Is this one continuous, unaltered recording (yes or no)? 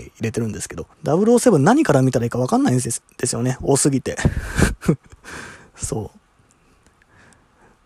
no